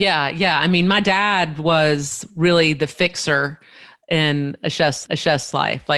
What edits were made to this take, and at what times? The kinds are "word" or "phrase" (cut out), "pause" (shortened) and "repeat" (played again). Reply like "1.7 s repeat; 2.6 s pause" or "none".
5.0 s repeat